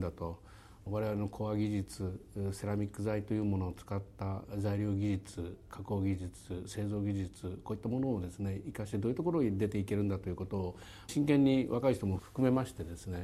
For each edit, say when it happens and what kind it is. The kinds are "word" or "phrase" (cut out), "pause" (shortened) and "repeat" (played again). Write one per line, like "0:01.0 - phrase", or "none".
0:11.1 - phrase